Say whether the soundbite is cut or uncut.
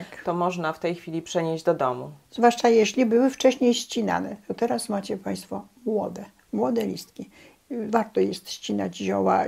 cut